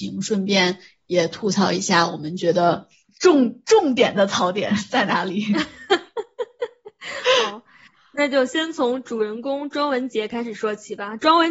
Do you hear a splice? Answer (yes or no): no